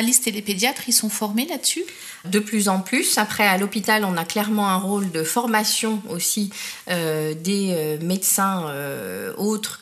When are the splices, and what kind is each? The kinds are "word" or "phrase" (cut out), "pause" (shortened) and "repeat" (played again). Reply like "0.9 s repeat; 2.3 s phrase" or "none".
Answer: 2.2 s word